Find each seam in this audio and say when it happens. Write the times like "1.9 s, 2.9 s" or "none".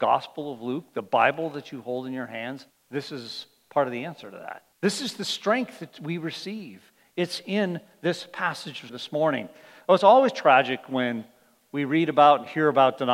2.7 s, 4.7 s, 8.9 s